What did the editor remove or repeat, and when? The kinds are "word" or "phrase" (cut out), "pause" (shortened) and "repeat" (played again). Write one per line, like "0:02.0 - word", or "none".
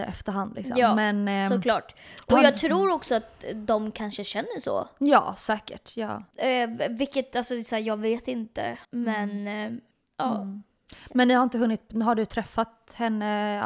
0:06.3 - pause
0:08.8 - pause
0:09.9 - pause